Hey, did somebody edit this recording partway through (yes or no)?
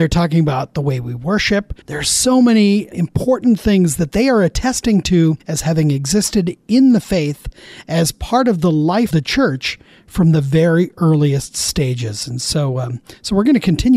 yes